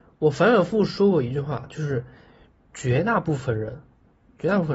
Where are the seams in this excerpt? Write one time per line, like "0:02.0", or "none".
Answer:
none